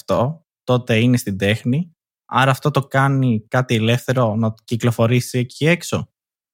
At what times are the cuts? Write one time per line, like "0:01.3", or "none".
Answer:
none